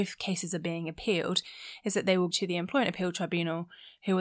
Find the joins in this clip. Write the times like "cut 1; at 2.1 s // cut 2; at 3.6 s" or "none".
cut 1; at 2.3 s